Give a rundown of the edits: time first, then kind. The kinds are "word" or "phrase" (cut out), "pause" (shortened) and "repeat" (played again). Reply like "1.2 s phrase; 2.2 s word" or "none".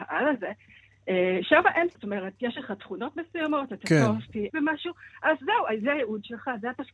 2.0 s word; 4.5 s word